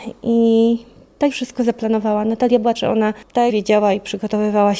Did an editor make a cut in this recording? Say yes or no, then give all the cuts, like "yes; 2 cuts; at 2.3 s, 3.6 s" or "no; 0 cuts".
yes; 3 cuts; at 1.3 s, 2.8 s, 3.5 s